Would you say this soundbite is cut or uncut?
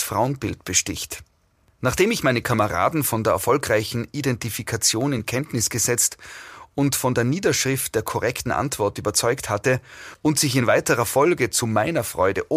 uncut